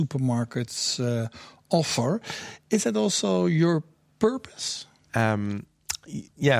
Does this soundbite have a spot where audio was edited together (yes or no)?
no